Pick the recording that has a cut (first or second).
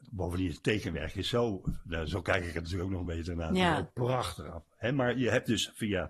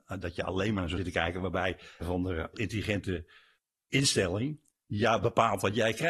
second